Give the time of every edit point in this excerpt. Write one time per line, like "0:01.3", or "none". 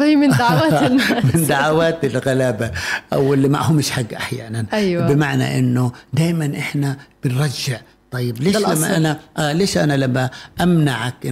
none